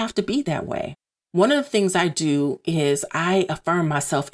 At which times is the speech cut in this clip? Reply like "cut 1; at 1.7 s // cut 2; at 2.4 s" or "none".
none